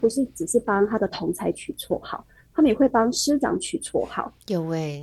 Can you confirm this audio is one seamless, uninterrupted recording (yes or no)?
yes